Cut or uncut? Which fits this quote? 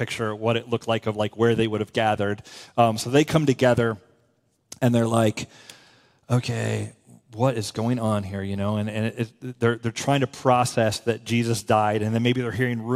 uncut